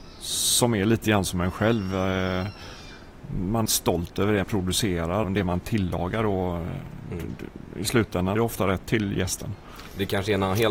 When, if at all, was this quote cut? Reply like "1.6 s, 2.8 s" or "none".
3.7 s, 4.4 s, 5.2 s, 8.4 s, 8.8 s